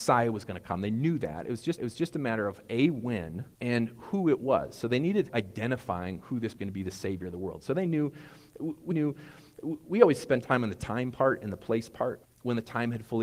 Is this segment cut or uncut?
cut